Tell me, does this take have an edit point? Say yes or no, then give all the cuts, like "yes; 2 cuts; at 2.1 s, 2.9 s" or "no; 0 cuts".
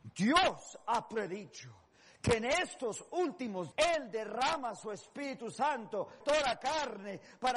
yes; 2 cuts; at 3.7 s, 6.2 s